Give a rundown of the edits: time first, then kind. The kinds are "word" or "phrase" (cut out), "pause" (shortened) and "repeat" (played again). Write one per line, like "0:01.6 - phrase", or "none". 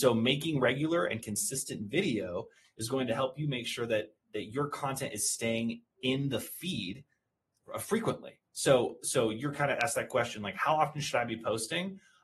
none